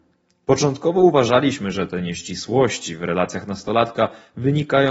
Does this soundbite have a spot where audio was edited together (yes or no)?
no